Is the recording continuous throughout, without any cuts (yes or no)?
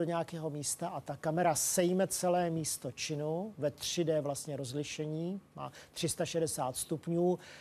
yes